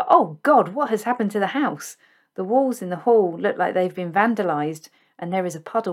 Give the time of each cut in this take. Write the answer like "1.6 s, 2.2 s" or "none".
none

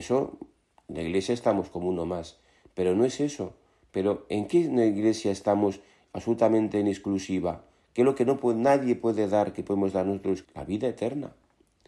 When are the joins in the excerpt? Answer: 10.4 s

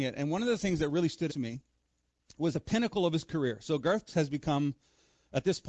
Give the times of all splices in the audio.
1.3 s, 2.5 s, 4.1 s

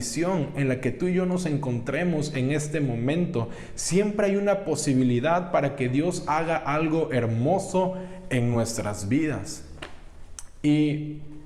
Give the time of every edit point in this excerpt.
none

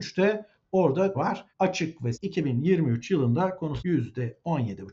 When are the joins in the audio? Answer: 1.1 s, 1.5 s, 2.1 s, 3.8 s

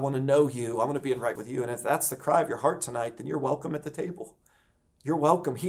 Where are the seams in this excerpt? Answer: 1.3 s

